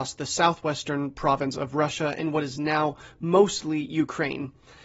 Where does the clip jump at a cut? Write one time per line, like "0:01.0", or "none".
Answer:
none